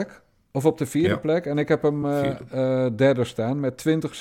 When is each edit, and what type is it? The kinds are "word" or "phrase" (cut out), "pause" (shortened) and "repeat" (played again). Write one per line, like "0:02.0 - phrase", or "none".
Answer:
none